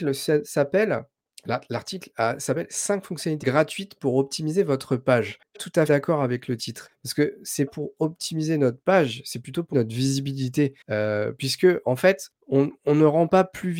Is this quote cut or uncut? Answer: cut